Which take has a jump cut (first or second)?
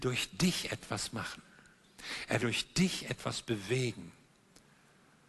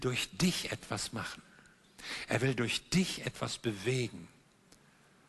first